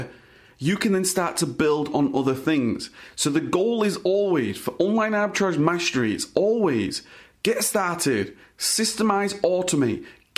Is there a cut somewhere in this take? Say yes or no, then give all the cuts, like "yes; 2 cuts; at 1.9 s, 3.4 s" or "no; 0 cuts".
no; 0 cuts